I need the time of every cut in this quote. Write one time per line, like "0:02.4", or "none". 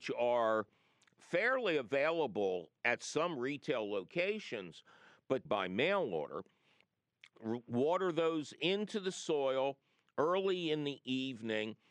0:02.8
0:05.5